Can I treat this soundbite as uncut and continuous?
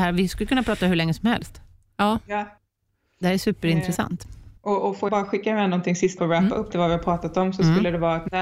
no; 4 cuts; at 4.6 s, 5.1 s, 6.2 s, 6.7 s

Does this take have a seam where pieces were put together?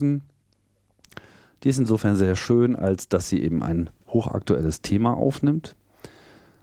no; 0 cuts

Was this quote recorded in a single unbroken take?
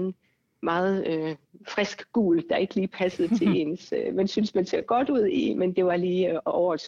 yes; 0 cuts

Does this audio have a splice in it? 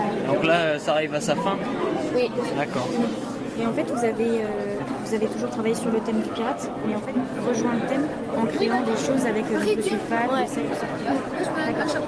yes; 1 cut; at 7.4 s

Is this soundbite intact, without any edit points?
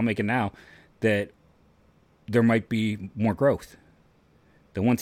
yes; 0 cuts

